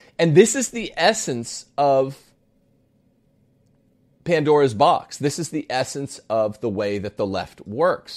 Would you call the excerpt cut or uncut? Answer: uncut